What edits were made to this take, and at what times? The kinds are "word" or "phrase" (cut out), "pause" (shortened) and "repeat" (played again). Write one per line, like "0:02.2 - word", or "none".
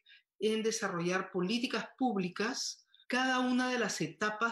0:03.0 - word